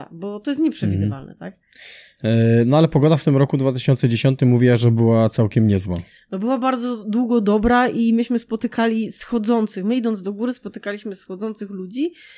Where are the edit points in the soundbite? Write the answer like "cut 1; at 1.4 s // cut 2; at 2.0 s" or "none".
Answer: none